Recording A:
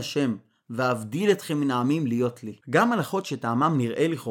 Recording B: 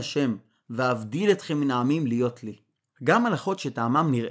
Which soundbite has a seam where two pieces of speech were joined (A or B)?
A